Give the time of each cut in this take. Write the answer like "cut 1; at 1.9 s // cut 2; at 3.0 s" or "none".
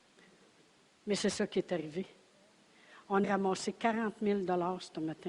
cut 1; at 3.2 s